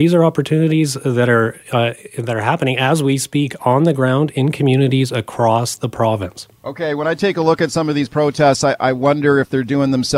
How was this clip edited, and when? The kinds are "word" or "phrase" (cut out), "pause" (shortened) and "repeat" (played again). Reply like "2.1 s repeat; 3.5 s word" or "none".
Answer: 6.6 s pause